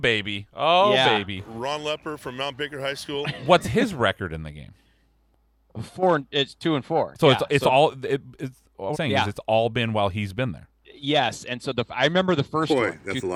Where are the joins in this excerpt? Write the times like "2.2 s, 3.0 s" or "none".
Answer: 8.9 s